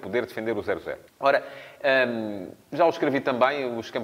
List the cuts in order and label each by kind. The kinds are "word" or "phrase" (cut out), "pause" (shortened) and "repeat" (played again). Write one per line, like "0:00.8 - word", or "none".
0:01.1 - pause
0:02.6 - pause